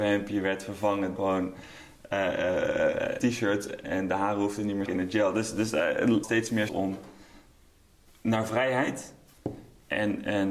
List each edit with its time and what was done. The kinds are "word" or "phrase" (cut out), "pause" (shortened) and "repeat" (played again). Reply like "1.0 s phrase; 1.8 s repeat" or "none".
1.2 s word; 3.2 s word; 3.8 s word; 4.9 s word; 6.2 s word; 6.7 s word